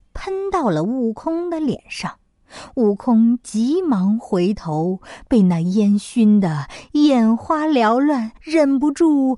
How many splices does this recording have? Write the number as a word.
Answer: one